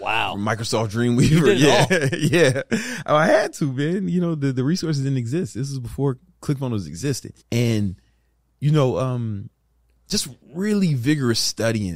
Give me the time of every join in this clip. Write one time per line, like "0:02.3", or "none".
0:07.4
0:10.4

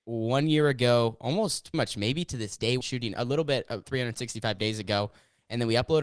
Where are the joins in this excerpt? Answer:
0:01.7
0:02.8
0:03.8

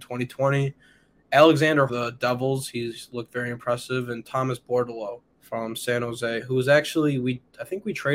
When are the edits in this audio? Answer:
0:01.9
0:05.3

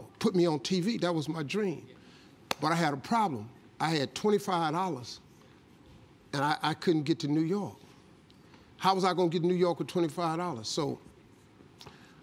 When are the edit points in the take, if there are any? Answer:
none

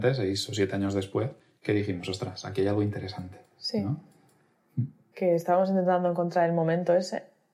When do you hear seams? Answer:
0:01.4

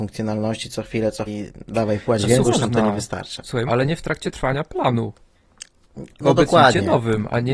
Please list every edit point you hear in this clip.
0:01.3
0:02.4
0:03.7

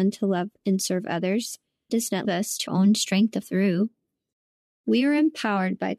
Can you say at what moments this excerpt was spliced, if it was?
0:01.9
0:02.2
0:02.7
0:03.4

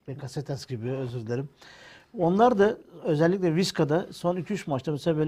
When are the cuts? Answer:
none

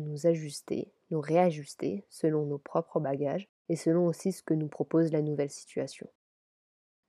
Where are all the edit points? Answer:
0:03.6

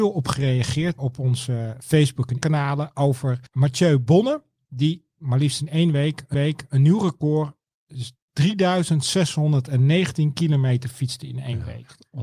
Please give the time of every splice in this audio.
0:01.0
0:02.4
0:03.5
0:06.3

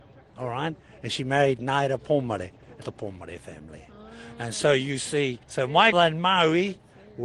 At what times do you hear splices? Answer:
0:02.8
0:05.4
0:05.9

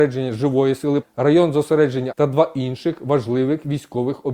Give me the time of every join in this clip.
0:01.0
0:02.1

